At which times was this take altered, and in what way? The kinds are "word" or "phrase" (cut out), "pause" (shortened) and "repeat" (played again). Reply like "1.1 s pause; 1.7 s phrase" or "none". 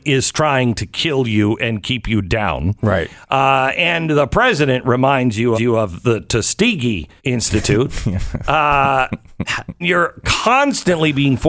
5.5 s repeat; 7.2 s pause; 9.8 s word